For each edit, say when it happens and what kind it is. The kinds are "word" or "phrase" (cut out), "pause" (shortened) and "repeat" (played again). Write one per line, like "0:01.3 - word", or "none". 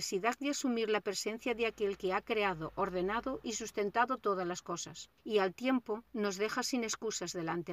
0:05.2 - pause
0:06.1 - pause